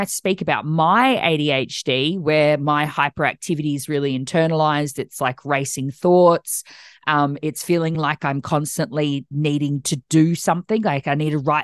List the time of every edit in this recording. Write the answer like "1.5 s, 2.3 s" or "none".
none